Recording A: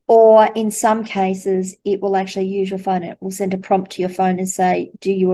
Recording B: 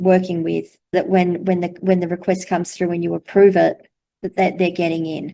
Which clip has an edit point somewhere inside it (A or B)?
B